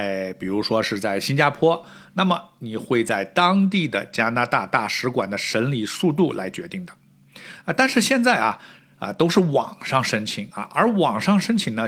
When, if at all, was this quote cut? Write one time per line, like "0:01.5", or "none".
none